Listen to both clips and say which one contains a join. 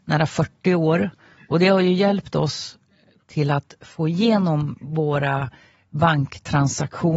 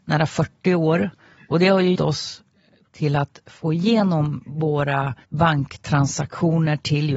second; 2 cuts; at 2.0 s, 5.2 s

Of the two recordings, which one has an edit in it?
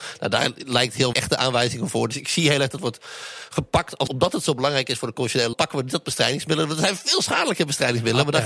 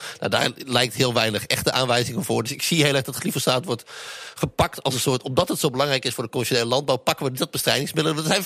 first; 4 cuts; at 1.1 s, 2.8 s, 4.1 s, 5.5 s

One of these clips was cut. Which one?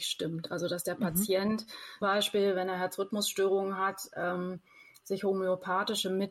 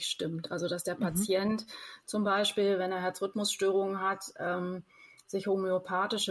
first; 1 cut; at 2.0 s

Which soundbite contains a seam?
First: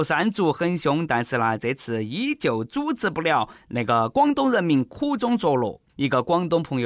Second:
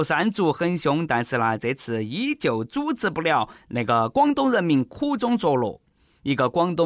first; 1 cut; at 5.9 s

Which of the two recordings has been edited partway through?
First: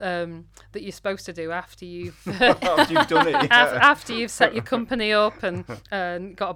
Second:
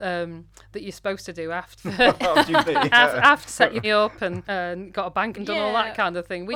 second; 6 cuts; at 1.8 s, 2.7 s, 3.5 s, 3.8 s, 4.4 s, 5.3 s

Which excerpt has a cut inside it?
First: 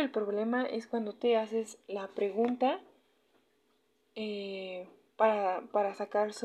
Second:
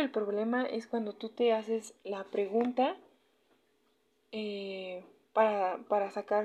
first; 1 cut; at 1.1 s

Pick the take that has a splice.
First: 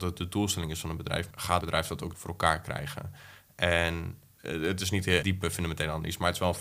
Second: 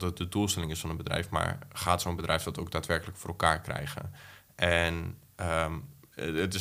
first; 5 cuts; at 1.3 s, 1.6 s, 2.1 s, 4.4 s, 5.2 s

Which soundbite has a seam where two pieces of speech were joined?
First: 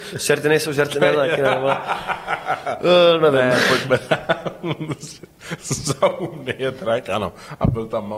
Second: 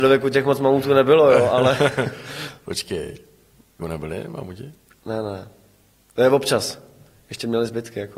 second; 1 cut; at 3.8 s

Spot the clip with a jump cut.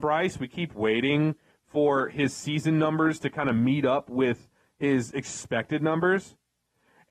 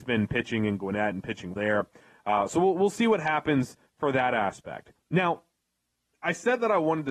second; 1 cut; at 1.5 s

